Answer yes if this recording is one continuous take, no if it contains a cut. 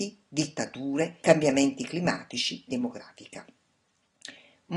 no